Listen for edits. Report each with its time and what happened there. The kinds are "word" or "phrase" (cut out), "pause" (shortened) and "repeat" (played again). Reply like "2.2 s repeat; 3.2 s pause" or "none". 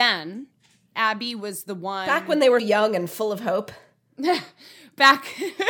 2.6 s word